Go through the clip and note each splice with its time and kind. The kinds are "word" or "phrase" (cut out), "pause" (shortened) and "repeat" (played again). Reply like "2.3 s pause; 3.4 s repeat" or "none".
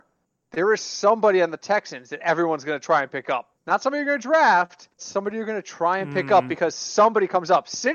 3.6 s pause; 5.0 s word